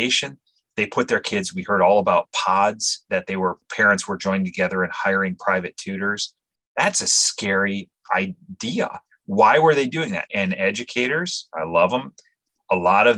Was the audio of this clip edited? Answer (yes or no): no